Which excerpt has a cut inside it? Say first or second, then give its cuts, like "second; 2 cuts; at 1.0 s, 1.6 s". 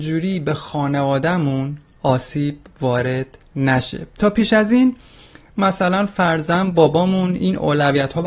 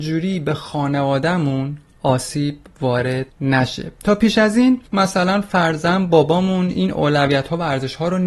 second; 2 cuts; at 3.3 s, 4.9 s